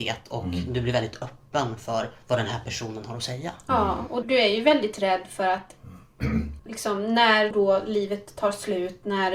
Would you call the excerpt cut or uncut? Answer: cut